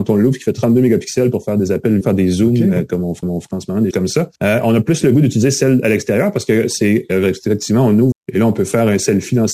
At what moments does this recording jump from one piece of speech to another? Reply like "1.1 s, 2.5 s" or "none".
2.0 s, 3.2 s, 3.9 s, 4.4 s, 8.1 s